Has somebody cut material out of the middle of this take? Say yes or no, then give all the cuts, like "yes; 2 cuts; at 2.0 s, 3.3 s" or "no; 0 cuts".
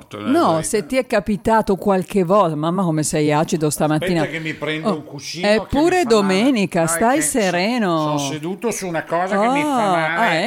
no; 0 cuts